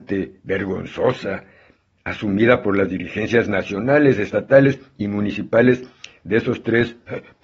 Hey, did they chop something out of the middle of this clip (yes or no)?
no